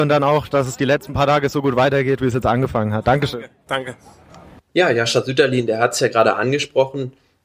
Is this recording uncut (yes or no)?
yes